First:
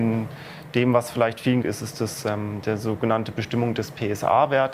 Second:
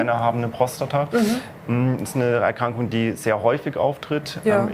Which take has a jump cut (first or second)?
first